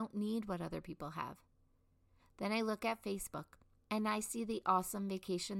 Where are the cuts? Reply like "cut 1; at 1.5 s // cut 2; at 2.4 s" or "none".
none